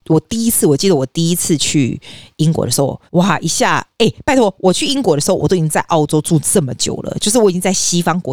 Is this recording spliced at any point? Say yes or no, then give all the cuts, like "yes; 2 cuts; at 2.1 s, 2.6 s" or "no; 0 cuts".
yes; 1 cut; at 3.1 s